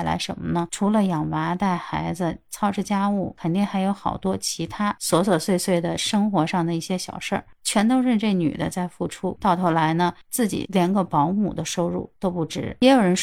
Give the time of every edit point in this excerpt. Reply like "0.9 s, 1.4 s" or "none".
12.2 s

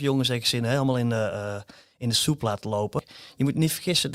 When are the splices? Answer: none

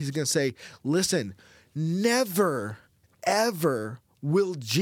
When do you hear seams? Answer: none

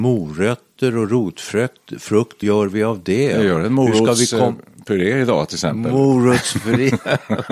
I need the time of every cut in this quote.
2.4 s

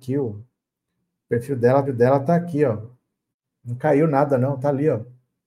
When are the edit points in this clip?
1.8 s, 3.3 s

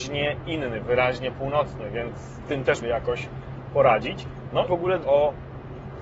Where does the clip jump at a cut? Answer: 2.4 s, 2.8 s, 4.7 s, 5.0 s

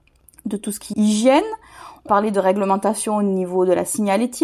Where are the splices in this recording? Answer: 0.9 s, 2.1 s

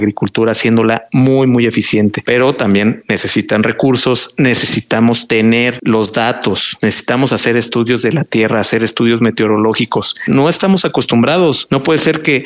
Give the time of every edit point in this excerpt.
none

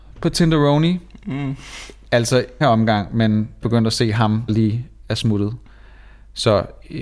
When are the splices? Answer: 2.6 s, 3.6 s, 4.5 s

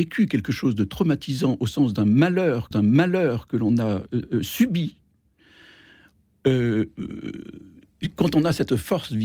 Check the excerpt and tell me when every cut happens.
2.7 s

